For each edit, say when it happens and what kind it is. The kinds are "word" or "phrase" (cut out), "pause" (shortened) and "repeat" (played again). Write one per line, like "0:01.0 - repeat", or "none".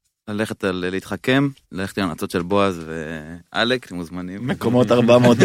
0:01.6 - pause